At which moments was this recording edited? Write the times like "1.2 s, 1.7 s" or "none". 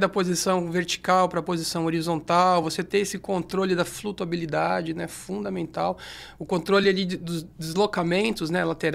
none